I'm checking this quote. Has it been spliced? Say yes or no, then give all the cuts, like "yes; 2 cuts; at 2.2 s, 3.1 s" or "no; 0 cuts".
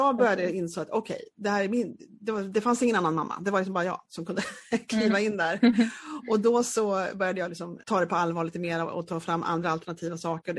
yes; 1 cut; at 7.8 s